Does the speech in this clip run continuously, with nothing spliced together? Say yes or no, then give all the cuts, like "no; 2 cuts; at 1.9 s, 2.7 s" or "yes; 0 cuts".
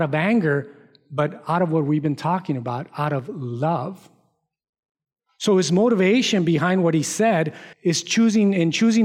no; 1 cut; at 7.7 s